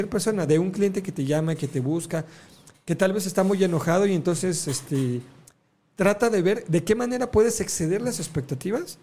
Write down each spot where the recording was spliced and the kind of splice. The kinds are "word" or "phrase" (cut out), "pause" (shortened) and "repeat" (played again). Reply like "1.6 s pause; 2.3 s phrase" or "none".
none